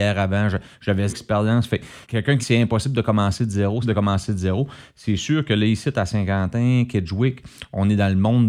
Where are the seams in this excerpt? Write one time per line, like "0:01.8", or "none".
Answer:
0:01.1
0:02.0
0:02.4
0:03.8